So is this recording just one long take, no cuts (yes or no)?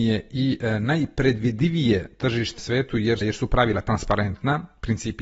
no